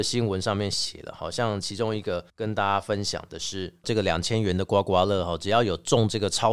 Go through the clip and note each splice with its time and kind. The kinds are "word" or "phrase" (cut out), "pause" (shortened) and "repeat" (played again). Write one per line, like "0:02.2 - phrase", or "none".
0:02.3 - pause